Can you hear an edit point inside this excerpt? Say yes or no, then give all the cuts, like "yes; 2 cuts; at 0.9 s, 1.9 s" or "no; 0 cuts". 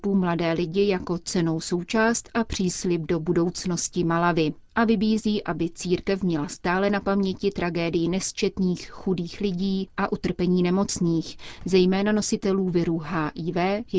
no; 0 cuts